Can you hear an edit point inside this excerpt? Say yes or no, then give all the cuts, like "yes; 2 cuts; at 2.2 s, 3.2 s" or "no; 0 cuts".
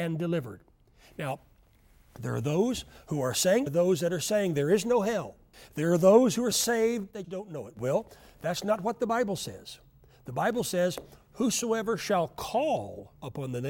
yes; 4 cuts; at 3.7 s, 5.5 s, 6.5 s, 7.2 s